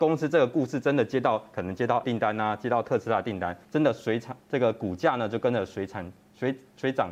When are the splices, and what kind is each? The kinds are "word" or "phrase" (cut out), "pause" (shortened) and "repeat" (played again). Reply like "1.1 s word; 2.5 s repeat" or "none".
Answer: 2.0 s word; 3.6 s pause; 4.4 s pause